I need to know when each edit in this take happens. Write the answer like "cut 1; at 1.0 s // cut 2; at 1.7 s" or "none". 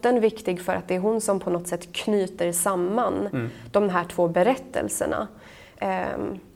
none